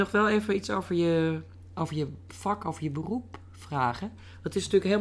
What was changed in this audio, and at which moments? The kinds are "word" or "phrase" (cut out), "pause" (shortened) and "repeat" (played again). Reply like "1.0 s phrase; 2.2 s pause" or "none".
none